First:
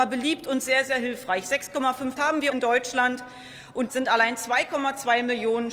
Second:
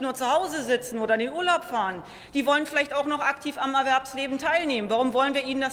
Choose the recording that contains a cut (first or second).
first